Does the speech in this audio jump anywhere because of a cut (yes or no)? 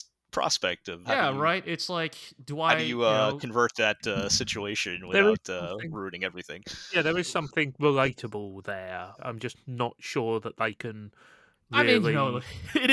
yes